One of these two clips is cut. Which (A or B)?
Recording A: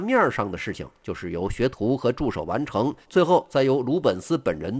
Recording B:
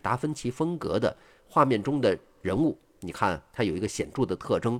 A